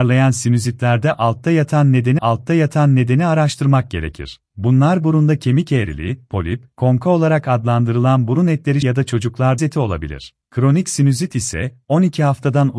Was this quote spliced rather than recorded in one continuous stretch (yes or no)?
yes